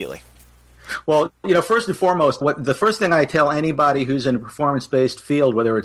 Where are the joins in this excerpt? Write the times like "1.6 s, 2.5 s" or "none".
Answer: 2.4 s

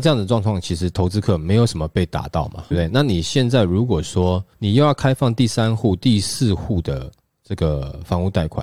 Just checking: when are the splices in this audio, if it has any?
2.7 s, 4.5 s

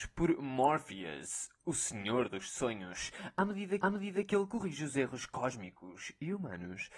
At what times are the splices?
3.8 s

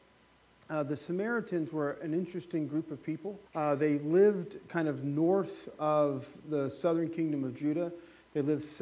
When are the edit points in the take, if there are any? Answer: 3.5 s

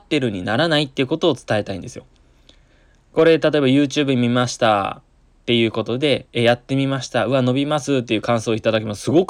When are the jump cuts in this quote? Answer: none

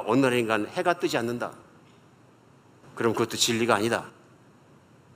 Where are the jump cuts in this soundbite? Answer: none

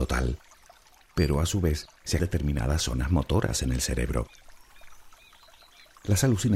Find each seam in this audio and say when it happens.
2.2 s

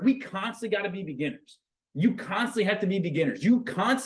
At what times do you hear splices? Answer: none

